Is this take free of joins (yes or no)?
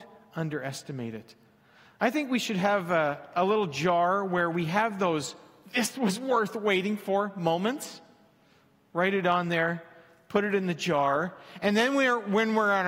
yes